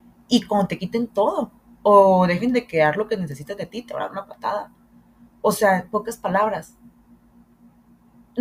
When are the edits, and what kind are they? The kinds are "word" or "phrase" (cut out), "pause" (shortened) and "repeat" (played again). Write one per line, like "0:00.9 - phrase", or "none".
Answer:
none